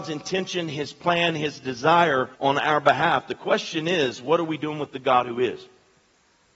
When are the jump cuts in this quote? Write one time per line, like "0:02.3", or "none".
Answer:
0:02.3